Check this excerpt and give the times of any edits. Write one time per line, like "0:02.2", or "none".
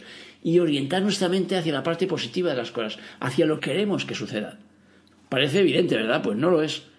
0:03.6